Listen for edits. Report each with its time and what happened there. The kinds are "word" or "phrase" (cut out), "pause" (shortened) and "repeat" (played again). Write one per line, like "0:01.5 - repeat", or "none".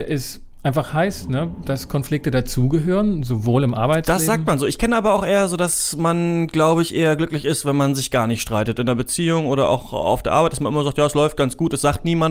none

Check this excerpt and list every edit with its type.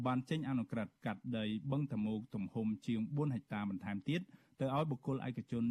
0:01.0 - pause

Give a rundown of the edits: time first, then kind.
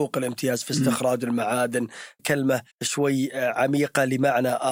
0:02.2 - word
0:02.7 - pause

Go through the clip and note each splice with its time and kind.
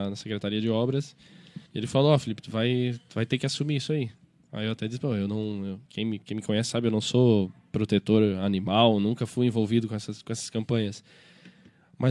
0:01.7 - pause
0:04.2 - pause
0:05.9 - pause

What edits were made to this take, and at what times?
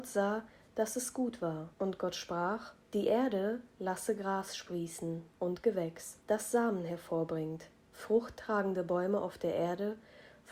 0:01.7 - pause
0:02.8 - pause
0:06.2 - pause

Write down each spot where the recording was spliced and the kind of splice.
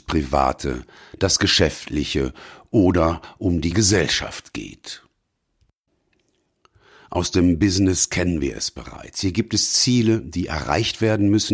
none

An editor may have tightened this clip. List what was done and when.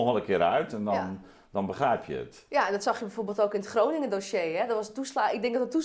none

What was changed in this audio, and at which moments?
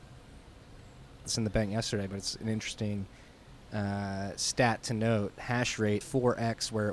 0:01.2 - phrase
0:06.0 - word

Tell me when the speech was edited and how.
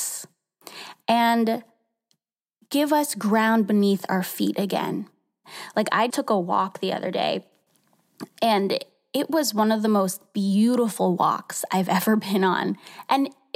0:06.1 - word

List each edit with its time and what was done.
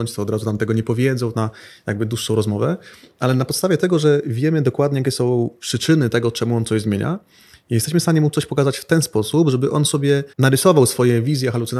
0:01.3 - phrase
0:10.3 - pause

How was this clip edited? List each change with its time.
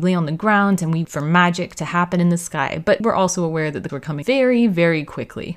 0:01.0 - word
0:03.0 - word
0:03.9 - word
0:04.2 - word

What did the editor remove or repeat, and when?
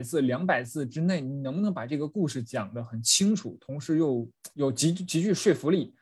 0:04.5 - pause

